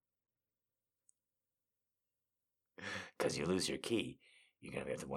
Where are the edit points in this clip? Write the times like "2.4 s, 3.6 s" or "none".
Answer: none